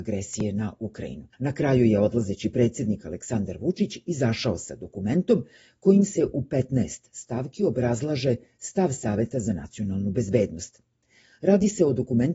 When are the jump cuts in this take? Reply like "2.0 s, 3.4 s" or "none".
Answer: 1.3 s